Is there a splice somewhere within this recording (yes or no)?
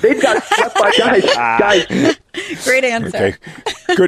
yes